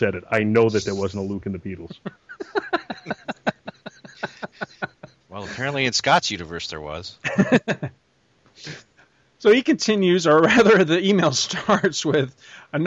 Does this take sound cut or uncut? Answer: uncut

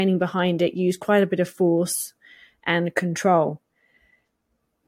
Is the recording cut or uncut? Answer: uncut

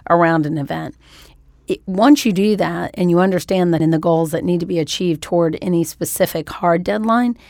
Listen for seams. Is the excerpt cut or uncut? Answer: cut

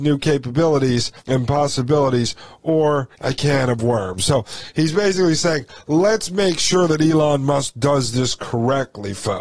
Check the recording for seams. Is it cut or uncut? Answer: cut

